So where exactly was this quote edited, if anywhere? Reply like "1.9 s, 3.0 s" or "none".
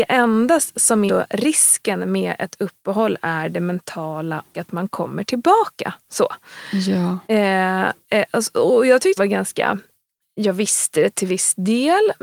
1.1 s, 4.5 s, 7.3 s, 9.2 s